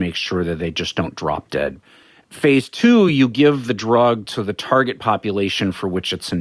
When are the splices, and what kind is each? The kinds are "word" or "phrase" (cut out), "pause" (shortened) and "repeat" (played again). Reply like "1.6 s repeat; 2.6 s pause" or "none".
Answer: none